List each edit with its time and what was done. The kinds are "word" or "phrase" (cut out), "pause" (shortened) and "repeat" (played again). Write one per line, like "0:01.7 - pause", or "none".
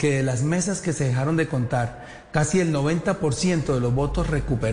none